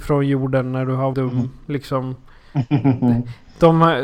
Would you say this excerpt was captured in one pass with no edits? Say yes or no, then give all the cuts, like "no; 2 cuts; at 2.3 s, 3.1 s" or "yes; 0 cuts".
no; 1 cut; at 1.1 s